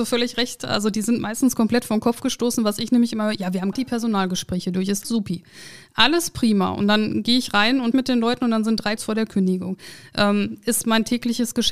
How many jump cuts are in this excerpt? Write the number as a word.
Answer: four